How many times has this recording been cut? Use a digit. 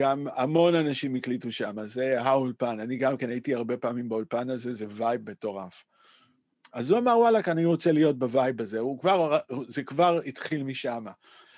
0